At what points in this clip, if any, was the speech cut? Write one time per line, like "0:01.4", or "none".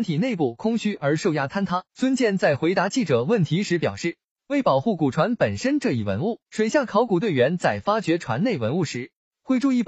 0:01.9
0:06.4